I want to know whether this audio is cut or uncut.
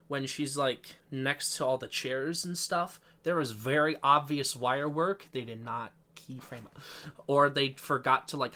cut